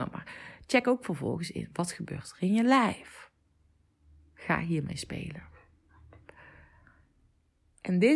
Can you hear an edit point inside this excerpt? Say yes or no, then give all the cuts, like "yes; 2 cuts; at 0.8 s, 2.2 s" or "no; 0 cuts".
no; 0 cuts